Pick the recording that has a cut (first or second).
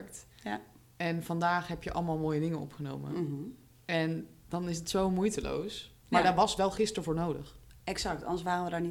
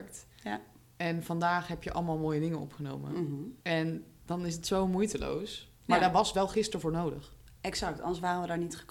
second